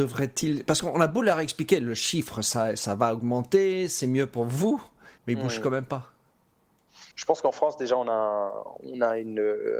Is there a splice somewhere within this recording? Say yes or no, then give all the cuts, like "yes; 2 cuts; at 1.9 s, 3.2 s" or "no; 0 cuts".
yes; 2 cuts; at 5.2 s, 7.1 s